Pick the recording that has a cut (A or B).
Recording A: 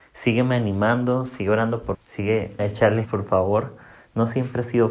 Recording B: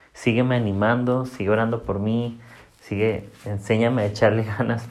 A